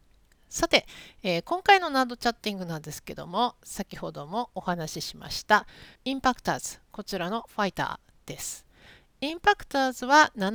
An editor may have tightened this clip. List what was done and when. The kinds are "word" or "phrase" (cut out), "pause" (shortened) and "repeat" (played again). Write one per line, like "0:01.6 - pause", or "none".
0:05.9 - pause